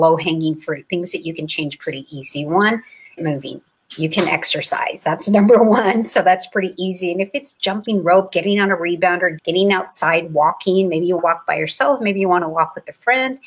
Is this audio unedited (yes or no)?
no